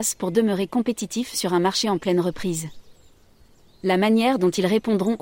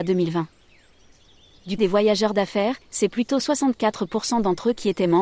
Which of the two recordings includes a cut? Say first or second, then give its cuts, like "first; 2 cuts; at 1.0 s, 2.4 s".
second; 2 cuts; at 1.8 s, 2.8 s